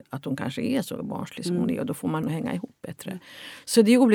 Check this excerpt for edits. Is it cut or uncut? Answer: cut